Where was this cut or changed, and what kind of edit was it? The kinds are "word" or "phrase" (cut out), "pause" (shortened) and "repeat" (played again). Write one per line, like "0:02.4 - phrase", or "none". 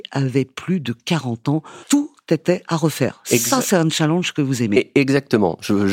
0:01.8 - pause